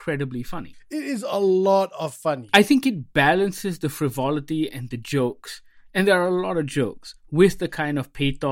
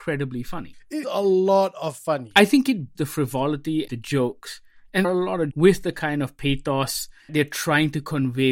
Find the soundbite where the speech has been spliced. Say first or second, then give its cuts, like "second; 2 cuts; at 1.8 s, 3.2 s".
second; 6 cuts; at 1.0 s, 2.9 s, 3.9 s, 5.0 s, 5.5 s, 7.3 s